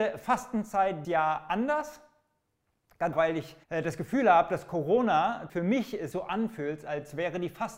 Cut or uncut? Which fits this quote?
cut